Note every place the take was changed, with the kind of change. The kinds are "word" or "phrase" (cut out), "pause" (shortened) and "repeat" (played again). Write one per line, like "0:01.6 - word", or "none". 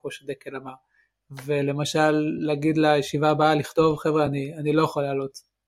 none